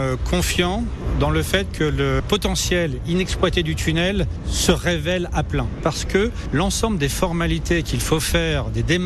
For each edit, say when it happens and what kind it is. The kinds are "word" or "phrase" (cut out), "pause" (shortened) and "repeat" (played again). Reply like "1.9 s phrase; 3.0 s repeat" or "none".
none

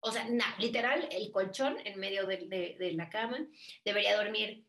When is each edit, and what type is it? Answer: none

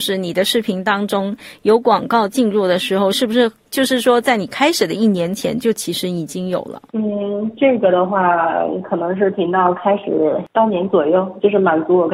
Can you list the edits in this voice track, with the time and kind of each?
6.9 s pause

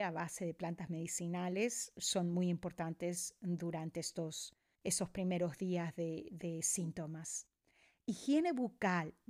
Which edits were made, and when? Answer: none

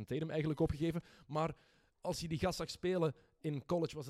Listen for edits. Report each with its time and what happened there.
none

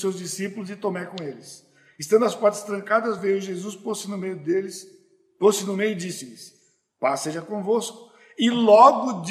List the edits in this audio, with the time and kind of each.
none

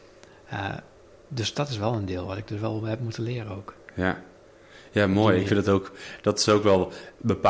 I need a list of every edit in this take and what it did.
none

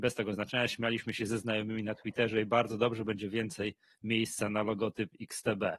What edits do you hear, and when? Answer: none

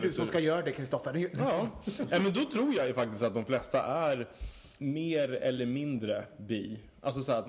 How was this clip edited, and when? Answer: 4.8 s word

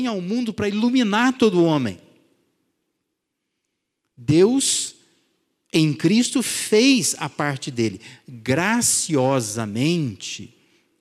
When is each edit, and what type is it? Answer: none

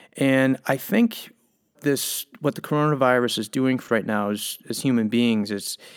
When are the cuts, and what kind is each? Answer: 1.8 s word; 3.9 s word

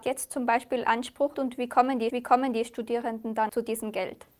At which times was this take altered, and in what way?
1.3 s phrase; 2.1 s repeat; 3.5 s word

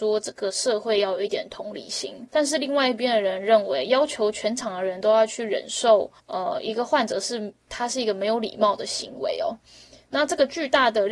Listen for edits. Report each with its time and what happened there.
2.3 s pause; 6.2 s pause; 7.6 s pause

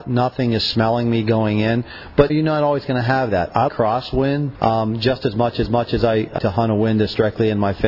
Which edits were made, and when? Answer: 2.3 s phrase; 3.7 s word; 4.5 s word; 5.7 s repeat; 6.4 s word

